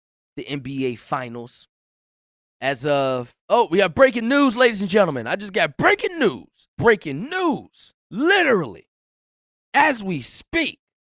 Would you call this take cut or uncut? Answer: cut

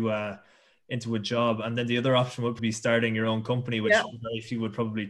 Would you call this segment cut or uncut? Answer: cut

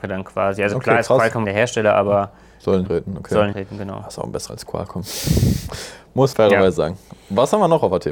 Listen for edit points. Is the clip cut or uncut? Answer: cut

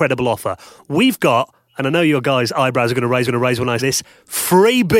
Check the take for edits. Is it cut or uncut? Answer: cut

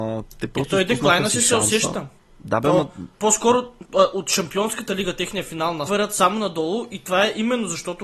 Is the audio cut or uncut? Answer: cut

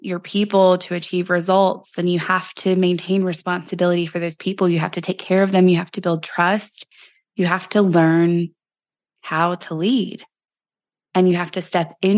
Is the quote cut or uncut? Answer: uncut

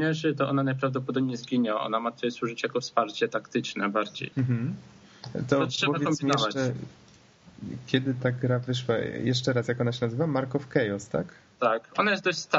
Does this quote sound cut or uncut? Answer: cut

